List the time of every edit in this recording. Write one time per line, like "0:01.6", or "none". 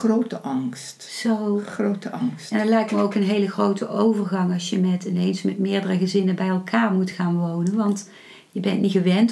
none